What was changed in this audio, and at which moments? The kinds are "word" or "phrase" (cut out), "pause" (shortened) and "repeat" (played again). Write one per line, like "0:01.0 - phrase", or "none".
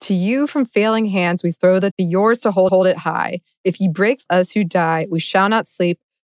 0:01.9 - word
0:02.7 - repeat
0:04.3 - phrase